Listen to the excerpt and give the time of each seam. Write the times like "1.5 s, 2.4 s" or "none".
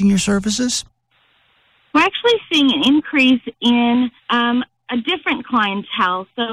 4.2 s